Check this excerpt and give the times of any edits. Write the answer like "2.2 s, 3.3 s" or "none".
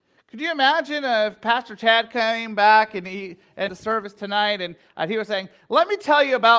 3.7 s